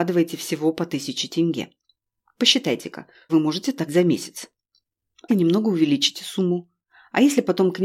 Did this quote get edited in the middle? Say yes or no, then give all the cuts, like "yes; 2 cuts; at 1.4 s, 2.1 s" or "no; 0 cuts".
yes; 3 cuts; at 3.3 s, 3.9 s, 5.3 s